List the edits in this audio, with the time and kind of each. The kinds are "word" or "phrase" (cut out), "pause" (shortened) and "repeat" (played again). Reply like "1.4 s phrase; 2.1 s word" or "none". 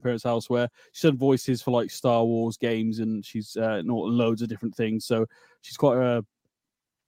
none